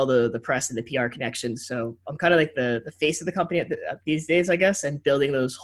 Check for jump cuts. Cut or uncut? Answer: uncut